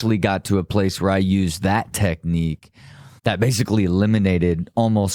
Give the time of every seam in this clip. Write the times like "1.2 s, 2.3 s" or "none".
3.2 s

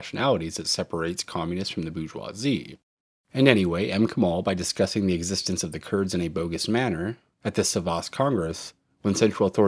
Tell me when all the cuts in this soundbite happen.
3.0 s

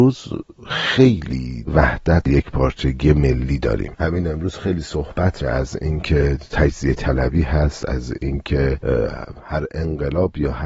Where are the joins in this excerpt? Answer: 1.7 s, 2.3 s, 3.9 s, 5.4 s

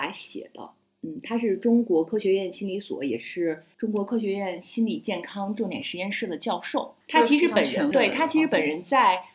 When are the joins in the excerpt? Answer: 7.9 s

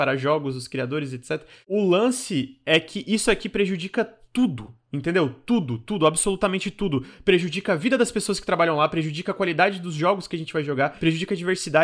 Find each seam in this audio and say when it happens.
none

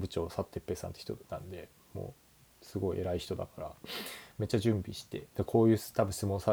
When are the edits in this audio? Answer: 1.2 s, 5.3 s

